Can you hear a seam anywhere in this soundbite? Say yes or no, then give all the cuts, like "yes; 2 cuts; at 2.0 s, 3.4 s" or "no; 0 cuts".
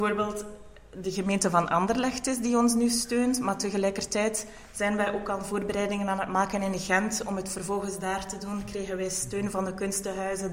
no; 0 cuts